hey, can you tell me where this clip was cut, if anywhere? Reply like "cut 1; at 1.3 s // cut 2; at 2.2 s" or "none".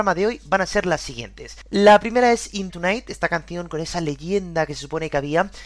cut 1; at 2.7 s